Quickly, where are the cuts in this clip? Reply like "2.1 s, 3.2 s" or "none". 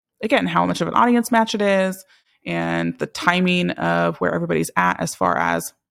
none

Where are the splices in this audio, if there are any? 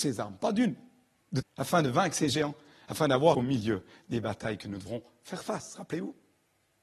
1.4 s, 3.3 s

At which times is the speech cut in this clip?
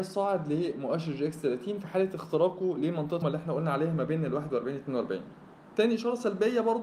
3.2 s

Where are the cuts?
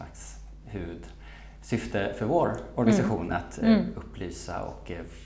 none

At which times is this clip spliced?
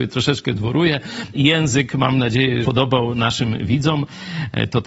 1.3 s, 2.6 s

